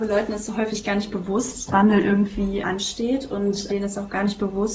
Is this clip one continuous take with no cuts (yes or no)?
no